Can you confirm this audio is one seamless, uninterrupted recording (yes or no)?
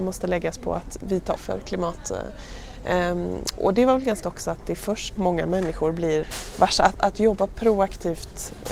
no